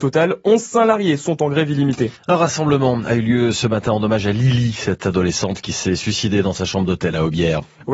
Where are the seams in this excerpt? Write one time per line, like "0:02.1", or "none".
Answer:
0:02.2